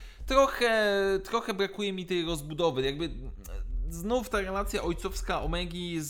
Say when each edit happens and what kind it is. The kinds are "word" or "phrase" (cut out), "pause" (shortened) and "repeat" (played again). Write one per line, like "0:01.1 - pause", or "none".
none